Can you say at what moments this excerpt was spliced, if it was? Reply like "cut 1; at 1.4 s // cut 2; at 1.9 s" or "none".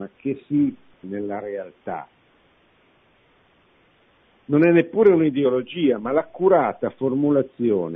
cut 1; at 1.0 s